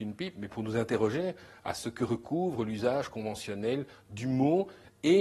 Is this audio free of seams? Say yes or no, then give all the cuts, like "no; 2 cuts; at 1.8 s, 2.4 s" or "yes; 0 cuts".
yes; 0 cuts